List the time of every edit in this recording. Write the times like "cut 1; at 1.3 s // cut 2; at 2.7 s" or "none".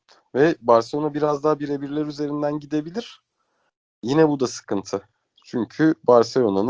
none